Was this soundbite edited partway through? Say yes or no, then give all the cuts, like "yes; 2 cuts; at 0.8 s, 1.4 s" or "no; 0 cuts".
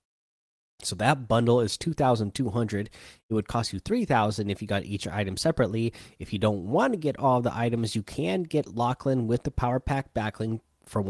no; 0 cuts